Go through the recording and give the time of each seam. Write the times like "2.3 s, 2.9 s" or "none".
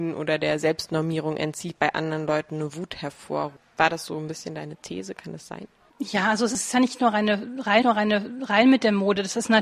1.7 s, 7.8 s